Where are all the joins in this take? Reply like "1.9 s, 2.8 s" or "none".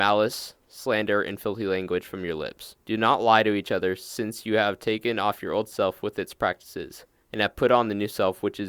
2.8 s